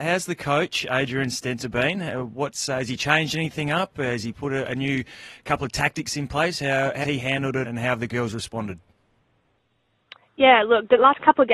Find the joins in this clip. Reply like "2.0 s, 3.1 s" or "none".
7.0 s, 7.6 s